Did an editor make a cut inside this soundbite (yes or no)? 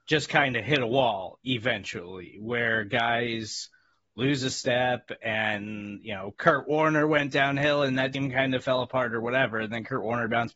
no